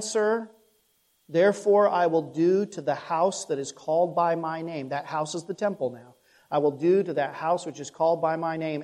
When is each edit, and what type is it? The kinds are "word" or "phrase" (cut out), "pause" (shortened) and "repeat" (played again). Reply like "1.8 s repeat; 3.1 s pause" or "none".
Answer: none